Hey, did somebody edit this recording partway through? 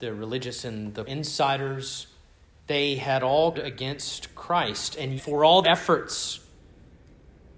yes; 4 cuts; at 1.1 s, 3.5 s, 5.2 s, 5.6 s

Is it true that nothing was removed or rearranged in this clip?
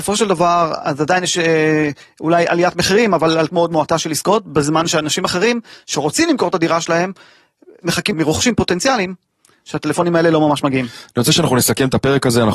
no; 2 cuts; at 3.5 s, 8.1 s

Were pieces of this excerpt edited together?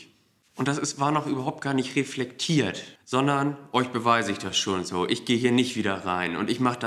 no; 0 cuts

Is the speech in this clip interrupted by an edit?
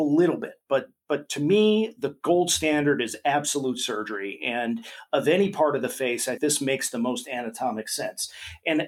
yes; 1 cut; at 6.4 s

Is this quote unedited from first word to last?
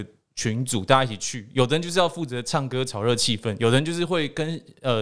yes; 0 cuts

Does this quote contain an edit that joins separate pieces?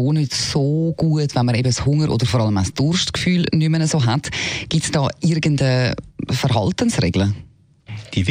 no; 0 cuts

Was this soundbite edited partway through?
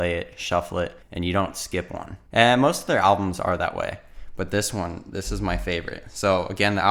yes; 2 cuts; at 1.0 s, 2.3 s

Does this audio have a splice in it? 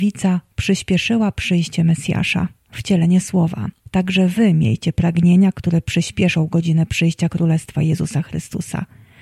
yes; 1 cut; at 3.9 s

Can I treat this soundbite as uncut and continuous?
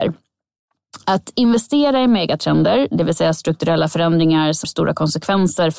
no; 1 cut; at 4.6 s

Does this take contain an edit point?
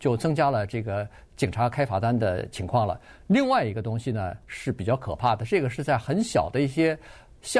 no; 0 cuts

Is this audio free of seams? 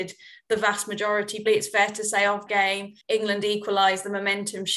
no; 3 cuts; at 1.5 s, 2.5 s, 3.0 s

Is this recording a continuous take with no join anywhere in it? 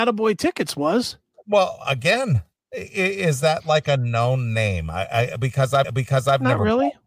no; 1 cut; at 5.8 s

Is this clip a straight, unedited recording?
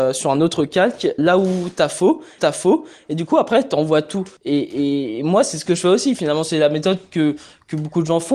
no; 3 cuts; at 1.2 s, 2.4 s, 4.4 s

